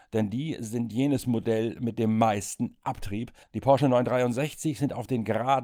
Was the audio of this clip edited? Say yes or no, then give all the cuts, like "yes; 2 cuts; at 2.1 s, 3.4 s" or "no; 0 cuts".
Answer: no; 0 cuts